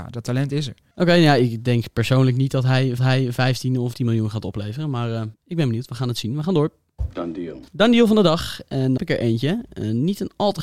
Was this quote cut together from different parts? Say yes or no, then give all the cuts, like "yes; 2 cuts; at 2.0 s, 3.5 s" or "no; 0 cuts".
yes; 5 cuts; at 3.0 s, 3.9 s, 5.3 s, 7.7 s, 9.0 s